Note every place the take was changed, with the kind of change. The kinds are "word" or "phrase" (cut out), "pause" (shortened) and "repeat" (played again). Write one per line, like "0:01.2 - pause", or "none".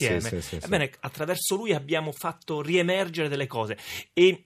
none